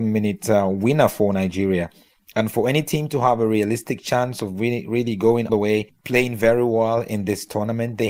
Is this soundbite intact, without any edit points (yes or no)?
no